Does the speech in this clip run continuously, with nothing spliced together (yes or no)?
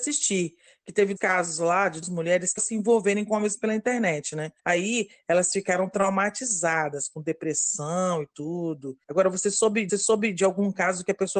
no